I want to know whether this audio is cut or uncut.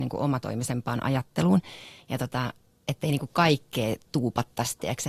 uncut